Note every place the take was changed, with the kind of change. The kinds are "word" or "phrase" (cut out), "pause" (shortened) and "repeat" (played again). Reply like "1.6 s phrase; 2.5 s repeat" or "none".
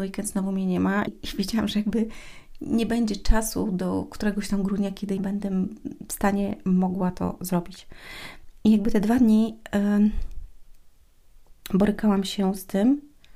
1.1 s word; 5.2 s word; 11.6 s pause